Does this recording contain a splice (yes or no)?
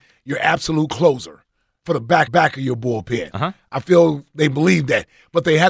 yes